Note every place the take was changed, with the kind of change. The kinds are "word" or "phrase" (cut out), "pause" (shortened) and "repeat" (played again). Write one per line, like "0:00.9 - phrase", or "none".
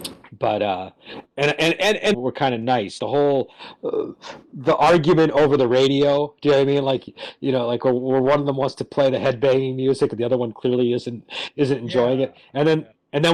0:02.1 - phrase
0:03.0 - word